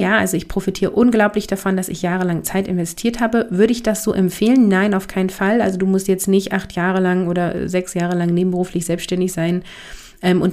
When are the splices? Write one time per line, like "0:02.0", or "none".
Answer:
none